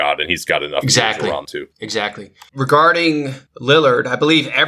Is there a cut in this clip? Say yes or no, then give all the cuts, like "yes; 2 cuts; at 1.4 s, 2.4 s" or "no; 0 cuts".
yes; 2 cuts; at 1.5 s, 2.5 s